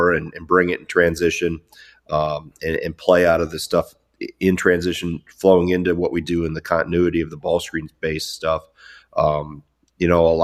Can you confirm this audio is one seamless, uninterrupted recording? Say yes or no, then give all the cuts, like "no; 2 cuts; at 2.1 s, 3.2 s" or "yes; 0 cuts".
yes; 0 cuts